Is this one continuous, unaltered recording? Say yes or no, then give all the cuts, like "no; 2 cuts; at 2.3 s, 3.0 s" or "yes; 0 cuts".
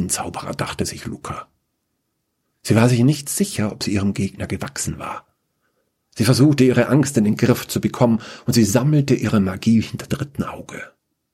no; 1 cut; at 10.1 s